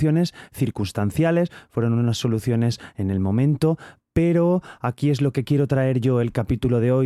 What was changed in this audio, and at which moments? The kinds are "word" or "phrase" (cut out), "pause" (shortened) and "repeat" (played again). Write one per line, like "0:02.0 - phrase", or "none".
none